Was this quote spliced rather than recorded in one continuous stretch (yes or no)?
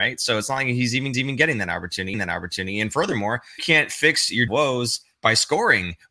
yes